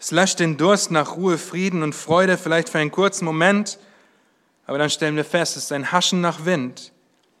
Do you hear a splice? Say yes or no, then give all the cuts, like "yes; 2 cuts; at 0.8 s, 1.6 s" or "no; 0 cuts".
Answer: no; 0 cuts